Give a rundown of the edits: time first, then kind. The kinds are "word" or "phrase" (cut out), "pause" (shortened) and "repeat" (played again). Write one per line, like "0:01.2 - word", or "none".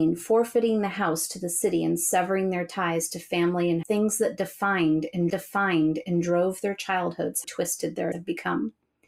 0:03.8 - word
0:05.3 - repeat
0:07.4 - word
0:08.1 - phrase